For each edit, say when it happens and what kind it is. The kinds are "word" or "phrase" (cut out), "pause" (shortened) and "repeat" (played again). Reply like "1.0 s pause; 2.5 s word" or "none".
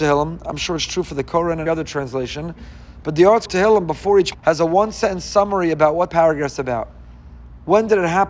1.7 s word; 3.5 s word; 4.3 s word; 6.1 s word